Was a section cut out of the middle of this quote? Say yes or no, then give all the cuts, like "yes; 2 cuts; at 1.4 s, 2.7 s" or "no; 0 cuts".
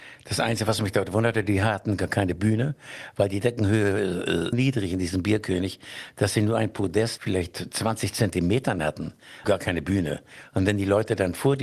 yes; 3 cuts; at 4.5 s, 7.2 s, 9.4 s